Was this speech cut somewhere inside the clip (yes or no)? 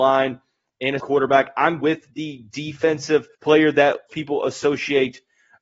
yes